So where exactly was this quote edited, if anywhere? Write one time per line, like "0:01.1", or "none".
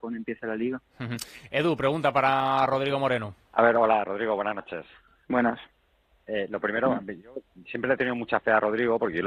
0:03.4